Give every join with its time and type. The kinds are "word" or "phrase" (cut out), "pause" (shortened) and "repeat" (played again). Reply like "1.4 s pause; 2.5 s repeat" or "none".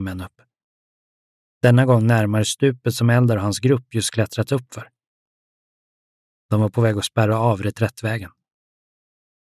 none